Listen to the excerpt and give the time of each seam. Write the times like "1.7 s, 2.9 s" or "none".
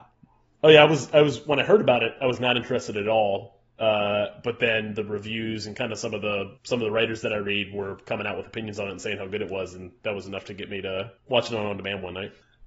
3.7 s, 6.6 s, 11.2 s